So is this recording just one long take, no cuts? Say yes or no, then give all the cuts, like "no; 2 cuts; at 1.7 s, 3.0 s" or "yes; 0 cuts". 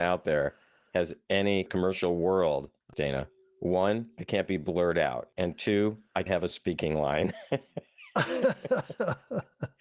no; 3 cuts; at 1.7 s, 2.9 s, 6.3 s